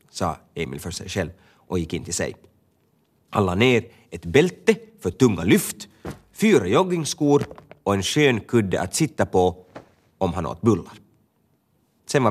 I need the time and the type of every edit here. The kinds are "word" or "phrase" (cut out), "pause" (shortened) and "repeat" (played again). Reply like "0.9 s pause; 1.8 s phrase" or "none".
none